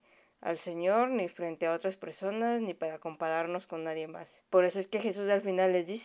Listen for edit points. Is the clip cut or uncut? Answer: cut